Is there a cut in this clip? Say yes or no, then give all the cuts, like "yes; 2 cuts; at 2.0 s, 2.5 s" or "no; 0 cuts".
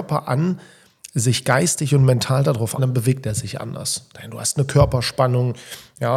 yes; 1 cut; at 2.8 s